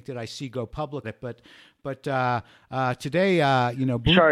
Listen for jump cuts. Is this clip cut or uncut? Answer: cut